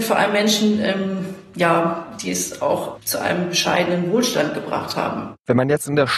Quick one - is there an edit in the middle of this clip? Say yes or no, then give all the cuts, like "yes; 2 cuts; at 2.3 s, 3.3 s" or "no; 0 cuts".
no; 0 cuts